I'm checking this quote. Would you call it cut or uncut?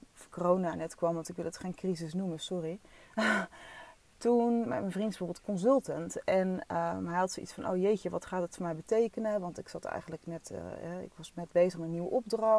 uncut